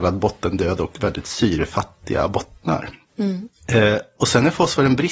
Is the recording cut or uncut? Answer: uncut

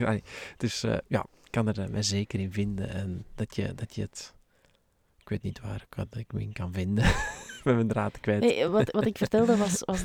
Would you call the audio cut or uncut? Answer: uncut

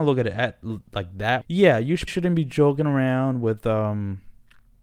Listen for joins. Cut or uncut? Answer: cut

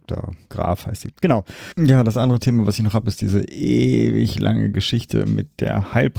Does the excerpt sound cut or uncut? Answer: uncut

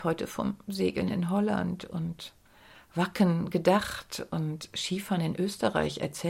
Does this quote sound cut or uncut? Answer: uncut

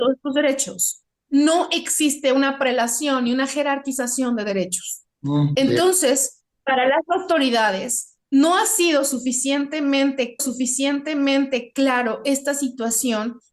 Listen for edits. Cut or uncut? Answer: cut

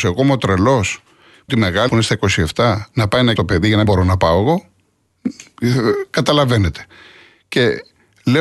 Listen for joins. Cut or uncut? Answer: cut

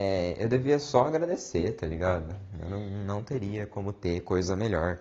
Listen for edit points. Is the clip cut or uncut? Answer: uncut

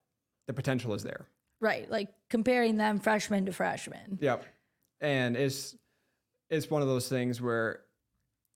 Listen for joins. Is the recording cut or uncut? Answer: uncut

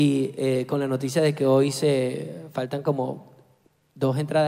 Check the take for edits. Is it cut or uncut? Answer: uncut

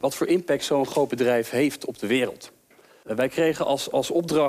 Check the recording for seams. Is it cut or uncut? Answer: uncut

